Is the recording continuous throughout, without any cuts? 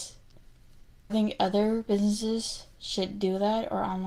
no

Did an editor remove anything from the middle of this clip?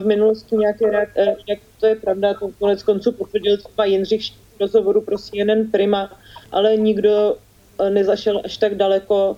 yes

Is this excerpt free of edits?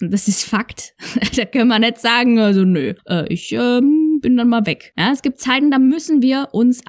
yes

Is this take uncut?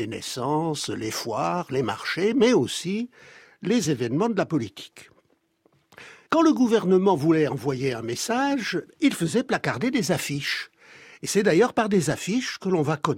yes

